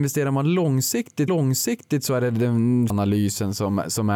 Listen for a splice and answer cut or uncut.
cut